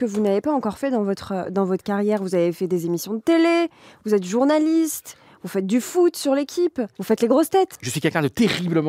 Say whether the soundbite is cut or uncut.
uncut